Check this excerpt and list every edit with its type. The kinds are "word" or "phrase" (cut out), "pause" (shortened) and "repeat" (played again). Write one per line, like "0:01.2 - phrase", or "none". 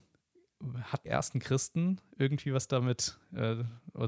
0:01.1 - word